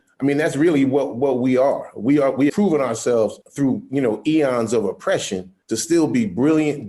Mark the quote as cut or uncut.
cut